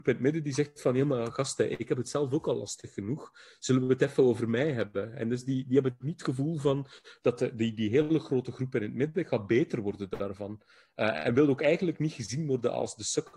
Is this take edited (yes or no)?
no